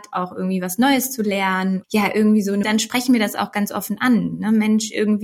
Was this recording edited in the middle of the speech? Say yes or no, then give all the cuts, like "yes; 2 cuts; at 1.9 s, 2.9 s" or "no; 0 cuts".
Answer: yes; 2 cuts; at 1.8 s, 2.6 s